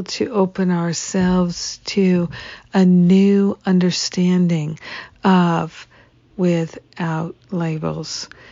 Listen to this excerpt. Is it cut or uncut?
cut